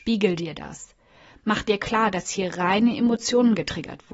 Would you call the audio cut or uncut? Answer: uncut